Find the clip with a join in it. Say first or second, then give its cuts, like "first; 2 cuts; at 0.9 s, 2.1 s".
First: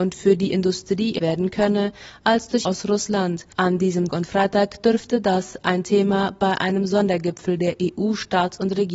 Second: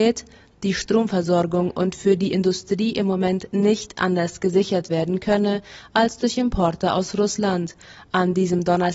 first; 4 cuts; at 1.2 s, 2.6 s, 3.5 s, 4.1 s